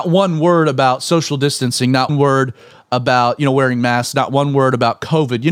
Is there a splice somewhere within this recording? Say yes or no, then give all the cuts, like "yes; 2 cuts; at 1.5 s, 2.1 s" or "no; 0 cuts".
yes; 1 cut; at 2.1 s